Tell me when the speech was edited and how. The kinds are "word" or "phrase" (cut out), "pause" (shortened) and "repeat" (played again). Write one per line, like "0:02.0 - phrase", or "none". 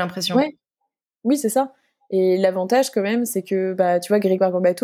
none